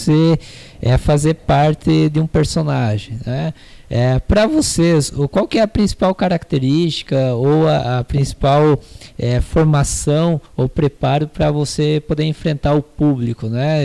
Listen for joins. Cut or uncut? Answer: cut